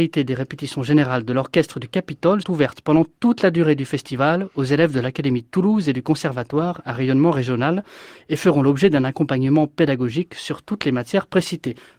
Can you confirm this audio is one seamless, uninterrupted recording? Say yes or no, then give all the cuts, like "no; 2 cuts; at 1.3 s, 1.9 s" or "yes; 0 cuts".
no; 1 cut; at 2.4 s